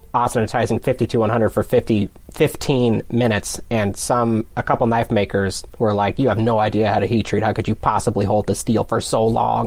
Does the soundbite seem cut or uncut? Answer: uncut